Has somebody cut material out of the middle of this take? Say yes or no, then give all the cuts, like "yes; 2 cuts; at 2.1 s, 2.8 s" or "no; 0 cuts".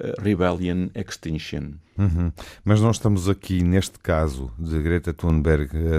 yes; 1 cut; at 1.9 s